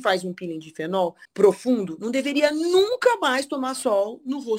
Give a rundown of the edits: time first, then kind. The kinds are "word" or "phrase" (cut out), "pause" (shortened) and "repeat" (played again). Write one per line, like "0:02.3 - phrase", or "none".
0:01.2 - pause